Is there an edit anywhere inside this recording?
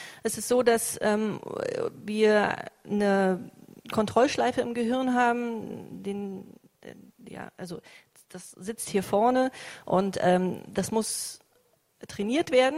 no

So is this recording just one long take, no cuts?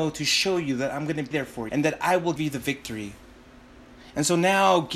no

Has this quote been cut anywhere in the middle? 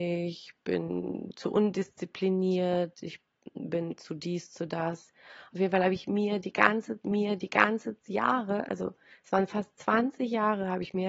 yes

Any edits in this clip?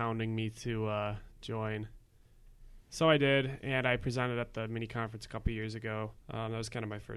yes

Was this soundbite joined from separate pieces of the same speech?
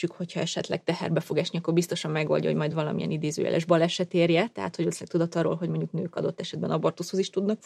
no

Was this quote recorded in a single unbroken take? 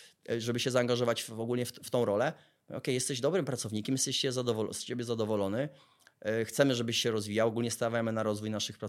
yes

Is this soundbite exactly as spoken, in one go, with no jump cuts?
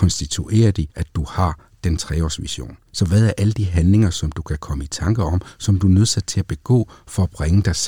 no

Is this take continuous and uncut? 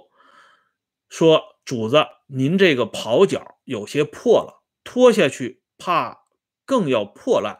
yes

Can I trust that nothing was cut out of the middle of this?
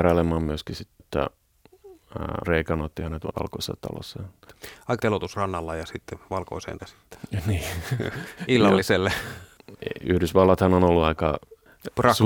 no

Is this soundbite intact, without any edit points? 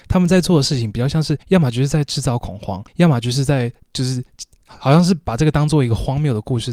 no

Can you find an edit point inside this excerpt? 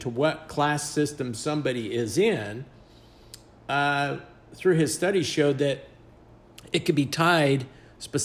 no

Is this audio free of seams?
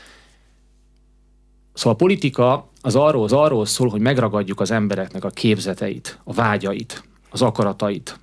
no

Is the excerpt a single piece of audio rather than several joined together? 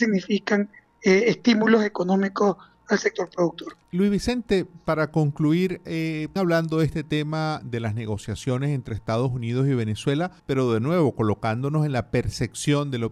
no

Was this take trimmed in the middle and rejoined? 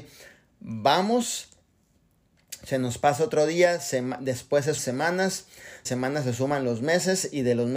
yes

